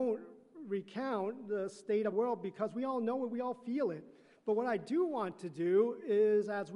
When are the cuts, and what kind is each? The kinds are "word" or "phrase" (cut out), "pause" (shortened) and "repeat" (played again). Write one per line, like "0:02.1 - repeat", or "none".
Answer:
0:02.1 - word